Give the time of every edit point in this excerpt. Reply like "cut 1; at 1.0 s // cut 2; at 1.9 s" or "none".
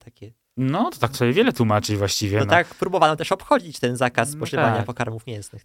cut 1; at 1.1 s